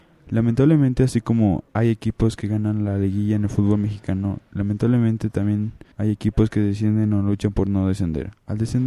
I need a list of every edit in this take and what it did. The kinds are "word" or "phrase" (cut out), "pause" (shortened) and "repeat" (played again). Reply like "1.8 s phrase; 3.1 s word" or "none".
1.7 s pause; 5.9 s pause